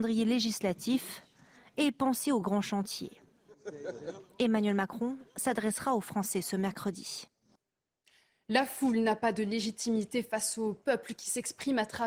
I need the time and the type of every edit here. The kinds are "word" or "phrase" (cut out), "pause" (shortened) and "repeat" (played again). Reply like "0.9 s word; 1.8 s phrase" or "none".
none